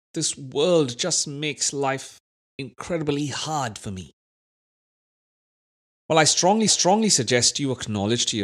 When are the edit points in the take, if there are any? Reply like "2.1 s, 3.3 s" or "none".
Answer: 6.7 s